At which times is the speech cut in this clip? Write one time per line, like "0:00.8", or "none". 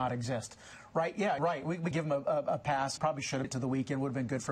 0:01.4
0:01.9
0:03.0
0:03.4

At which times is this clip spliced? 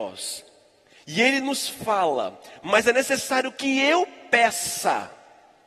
none

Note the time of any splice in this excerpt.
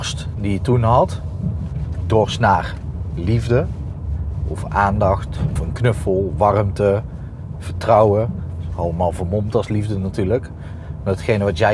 0:02.0
0:05.6

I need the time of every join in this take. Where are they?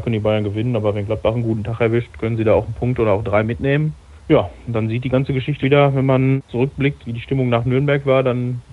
0:05.6
0:07.0

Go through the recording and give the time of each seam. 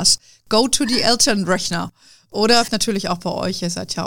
0:02.7

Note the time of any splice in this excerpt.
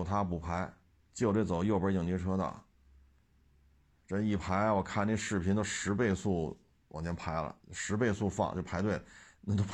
0:00.9
0:07.6

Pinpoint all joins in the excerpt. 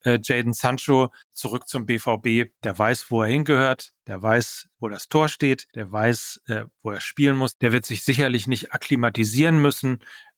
0:01.2
0:02.6
0:04.0
0:04.7
0:05.7

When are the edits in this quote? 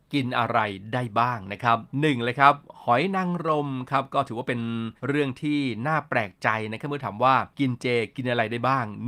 0:01.9
0:05.0
0:07.5

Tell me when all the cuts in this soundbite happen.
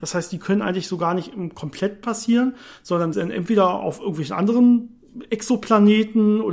0:02.0
0:03.1

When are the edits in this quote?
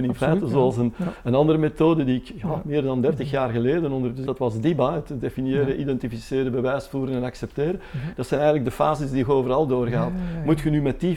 0:04.3

